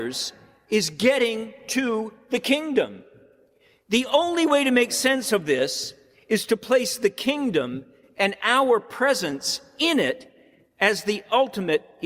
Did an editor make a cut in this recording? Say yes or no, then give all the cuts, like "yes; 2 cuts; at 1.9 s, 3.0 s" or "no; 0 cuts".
no; 0 cuts